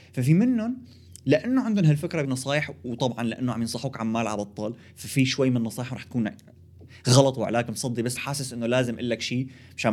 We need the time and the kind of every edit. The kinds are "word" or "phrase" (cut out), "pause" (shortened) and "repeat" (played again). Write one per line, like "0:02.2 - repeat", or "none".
0:02.2 - phrase
0:08.2 - word